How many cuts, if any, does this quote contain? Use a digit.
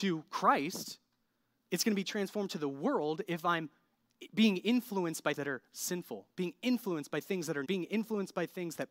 2